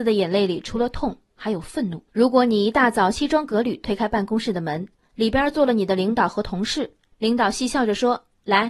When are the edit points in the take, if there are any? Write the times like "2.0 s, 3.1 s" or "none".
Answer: 2.1 s